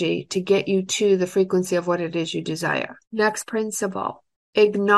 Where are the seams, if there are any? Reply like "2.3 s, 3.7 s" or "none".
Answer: 3.0 s

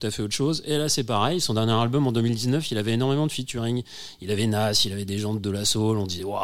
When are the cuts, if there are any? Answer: none

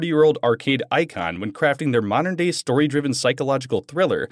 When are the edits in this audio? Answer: none

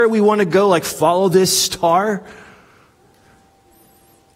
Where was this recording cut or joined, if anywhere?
none

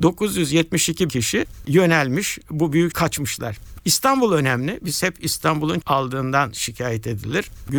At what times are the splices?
1.1 s, 2.9 s, 5.8 s

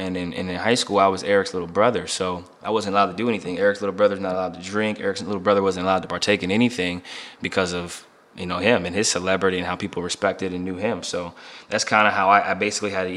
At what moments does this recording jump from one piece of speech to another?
none

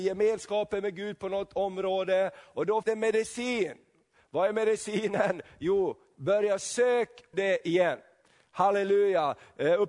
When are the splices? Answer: 2.8 s, 7.3 s

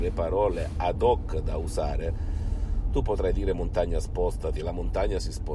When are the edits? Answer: none

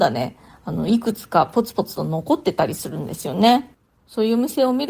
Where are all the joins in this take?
none

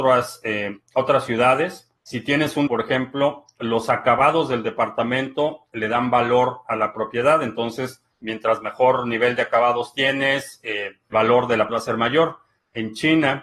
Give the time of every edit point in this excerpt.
2.0 s, 2.7 s, 8.1 s, 11.1 s, 11.7 s

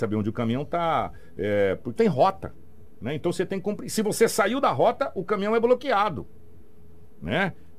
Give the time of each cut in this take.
2.0 s

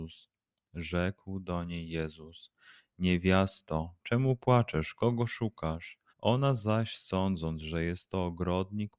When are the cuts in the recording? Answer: 6.1 s

